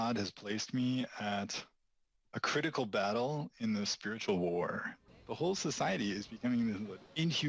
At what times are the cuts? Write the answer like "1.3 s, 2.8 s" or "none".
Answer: 5.1 s